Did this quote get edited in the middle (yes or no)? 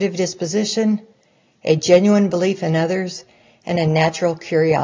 no